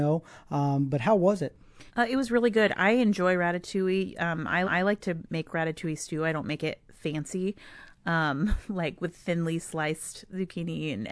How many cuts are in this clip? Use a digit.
2